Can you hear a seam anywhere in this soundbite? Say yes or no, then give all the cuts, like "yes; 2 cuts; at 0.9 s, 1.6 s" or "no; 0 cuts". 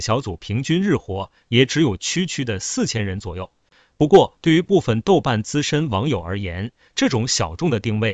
no; 0 cuts